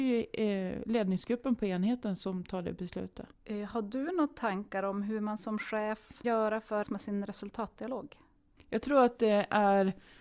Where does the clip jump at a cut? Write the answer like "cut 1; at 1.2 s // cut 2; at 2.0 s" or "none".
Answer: cut 1; at 3.3 s // cut 2; at 6.2 s // cut 3; at 6.8 s